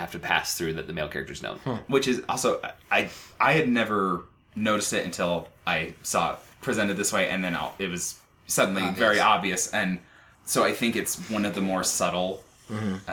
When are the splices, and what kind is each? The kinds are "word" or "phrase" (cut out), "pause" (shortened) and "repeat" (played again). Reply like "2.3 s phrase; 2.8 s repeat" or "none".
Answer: none